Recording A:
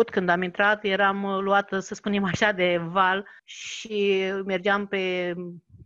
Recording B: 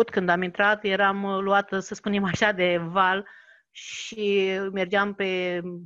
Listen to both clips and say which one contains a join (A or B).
A